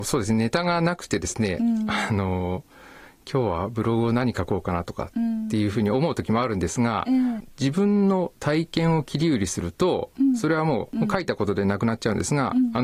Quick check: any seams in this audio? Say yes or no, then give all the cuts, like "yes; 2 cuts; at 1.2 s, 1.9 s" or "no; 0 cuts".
no; 0 cuts